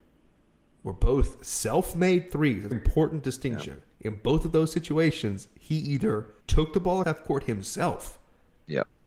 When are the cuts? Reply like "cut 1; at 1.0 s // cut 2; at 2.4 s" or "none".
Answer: cut 1; at 2.7 s // cut 2; at 3.9 s // cut 3; at 6.4 s // cut 4; at 7.0 s

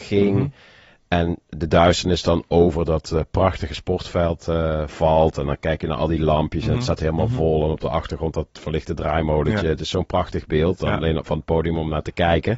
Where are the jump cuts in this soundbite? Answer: none

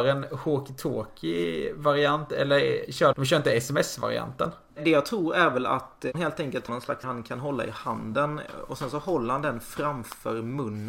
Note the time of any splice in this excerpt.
cut 1; at 3.1 s // cut 2; at 6.1 s // cut 3; at 6.7 s // cut 4; at 7.0 s

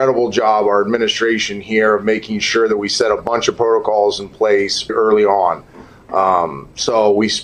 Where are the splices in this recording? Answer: cut 1; at 4.9 s

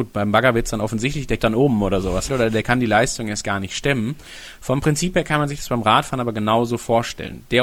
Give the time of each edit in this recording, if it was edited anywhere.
cut 1; at 1.4 s // cut 2; at 2.3 s

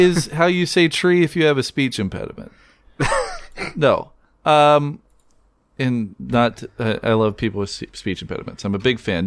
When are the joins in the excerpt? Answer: none

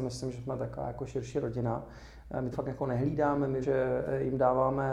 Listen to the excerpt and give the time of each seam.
cut 1; at 2.5 s // cut 2; at 3.6 s

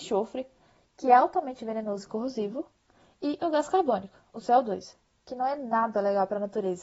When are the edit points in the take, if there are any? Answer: none

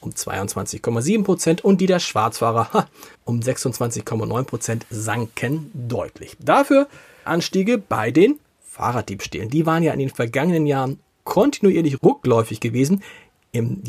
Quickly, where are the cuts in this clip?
cut 1; at 3.1 s // cut 2; at 7.3 s // cut 3; at 12.0 s

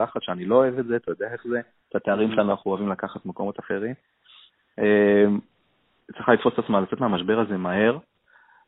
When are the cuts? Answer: none

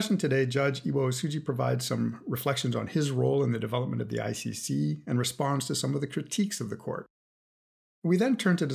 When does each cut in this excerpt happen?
none

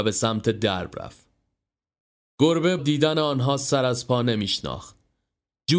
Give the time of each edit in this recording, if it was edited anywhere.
cut 1; at 2.8 s

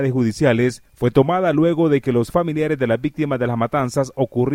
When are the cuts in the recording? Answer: none

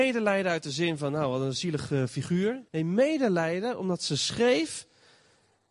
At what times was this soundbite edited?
cut 1; at 2.7 s

